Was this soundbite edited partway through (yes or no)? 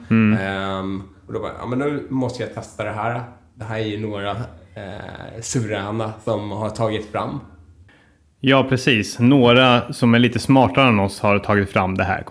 no